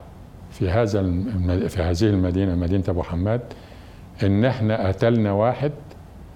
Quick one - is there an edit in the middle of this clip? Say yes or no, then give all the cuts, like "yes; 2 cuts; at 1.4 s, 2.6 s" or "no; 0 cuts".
no; 0 cuts